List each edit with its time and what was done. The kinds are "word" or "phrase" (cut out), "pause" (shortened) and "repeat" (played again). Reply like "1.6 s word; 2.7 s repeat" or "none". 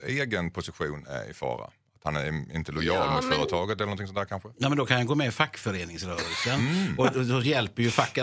none

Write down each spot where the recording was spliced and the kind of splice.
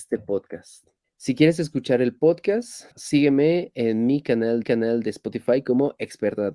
1.0 s pause; 2.9 s pause; 4.6 s repeat

